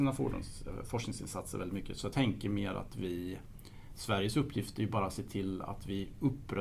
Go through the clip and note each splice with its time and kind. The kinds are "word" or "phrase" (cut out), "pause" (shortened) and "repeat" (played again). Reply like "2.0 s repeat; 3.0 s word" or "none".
2.1 s word